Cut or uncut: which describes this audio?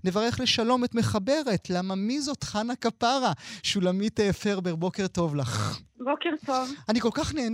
cut